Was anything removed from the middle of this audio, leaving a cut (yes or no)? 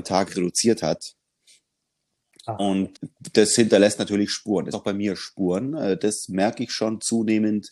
yes